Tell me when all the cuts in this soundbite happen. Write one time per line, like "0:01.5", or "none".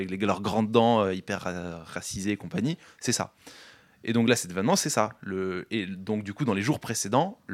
none